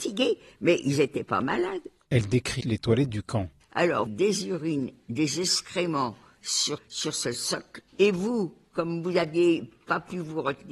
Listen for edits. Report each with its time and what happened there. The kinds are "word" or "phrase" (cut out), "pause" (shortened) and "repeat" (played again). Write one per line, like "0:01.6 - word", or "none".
0:02.6 - word
0:04.1 - phrase
0:06.8 - word
0:07.9 - pause